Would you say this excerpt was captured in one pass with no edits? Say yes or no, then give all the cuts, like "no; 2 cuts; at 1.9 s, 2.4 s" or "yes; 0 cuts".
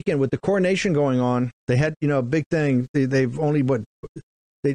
no; 1 cut; at 1.6 s